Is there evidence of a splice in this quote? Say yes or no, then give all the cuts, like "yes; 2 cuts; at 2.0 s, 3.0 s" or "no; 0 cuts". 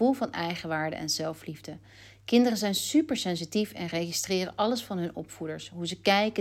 no; 0 cuts